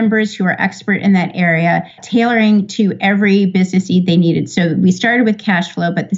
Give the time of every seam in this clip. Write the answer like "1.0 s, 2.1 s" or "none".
2.0 s